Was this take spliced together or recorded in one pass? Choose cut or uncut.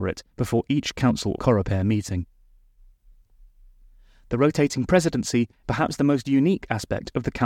cut